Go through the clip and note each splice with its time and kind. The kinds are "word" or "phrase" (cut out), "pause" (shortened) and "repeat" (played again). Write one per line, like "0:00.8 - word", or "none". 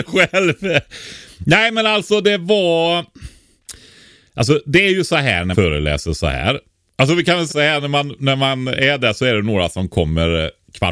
0:05.5 - word
0:07.5 - word